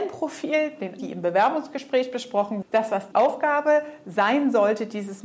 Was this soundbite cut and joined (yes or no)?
yes